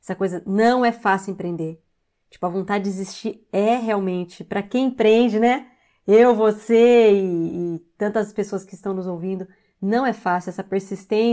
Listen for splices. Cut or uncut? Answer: uncut